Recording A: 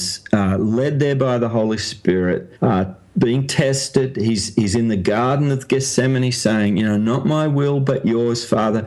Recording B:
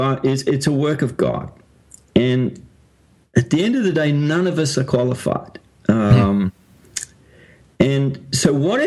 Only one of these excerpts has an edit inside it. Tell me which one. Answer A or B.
A